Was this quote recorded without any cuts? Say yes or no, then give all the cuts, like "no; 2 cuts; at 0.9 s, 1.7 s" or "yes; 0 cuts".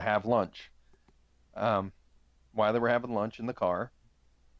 yes; 0 cuts